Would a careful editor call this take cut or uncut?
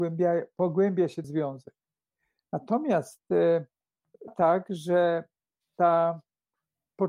cut